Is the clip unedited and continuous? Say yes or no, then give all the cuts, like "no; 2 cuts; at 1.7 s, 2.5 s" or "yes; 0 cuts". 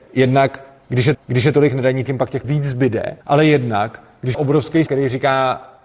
no; 6 cuts; at 1.1 s, 2.1 s, 2.4 s, 3.2 s, 4.3 s, 4.9 s